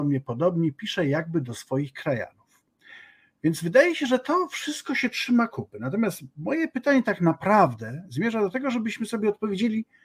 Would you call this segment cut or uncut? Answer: uncut